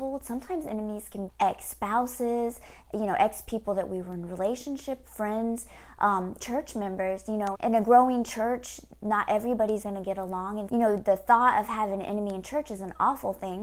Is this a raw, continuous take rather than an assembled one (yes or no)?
no